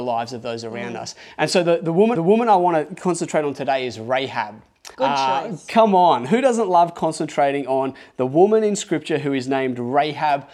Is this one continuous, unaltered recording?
no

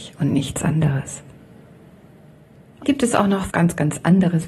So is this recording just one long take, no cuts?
no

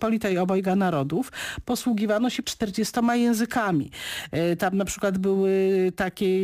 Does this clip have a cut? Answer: yes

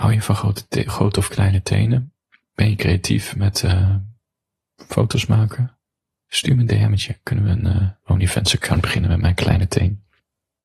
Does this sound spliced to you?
no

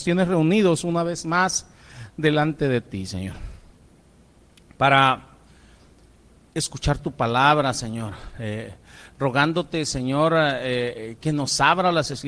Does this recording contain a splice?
no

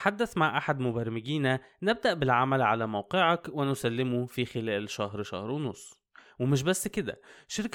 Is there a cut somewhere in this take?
no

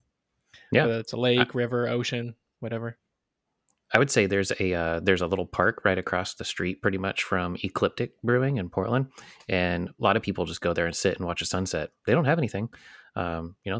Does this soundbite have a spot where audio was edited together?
no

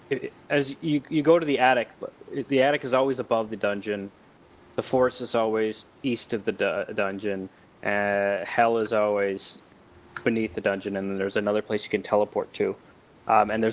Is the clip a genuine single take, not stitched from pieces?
yes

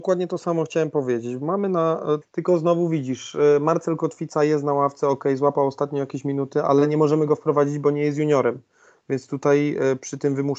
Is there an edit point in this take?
yes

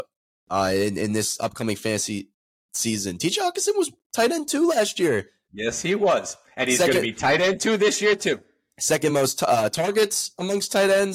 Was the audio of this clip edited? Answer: no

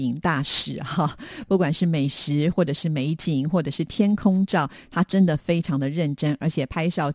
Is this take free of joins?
yes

